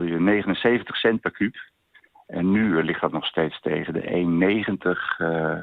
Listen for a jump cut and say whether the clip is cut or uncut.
uncut